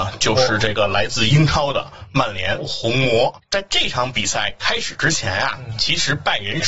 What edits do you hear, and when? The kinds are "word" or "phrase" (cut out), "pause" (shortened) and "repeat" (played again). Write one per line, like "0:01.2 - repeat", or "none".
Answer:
0:02.6 - phrase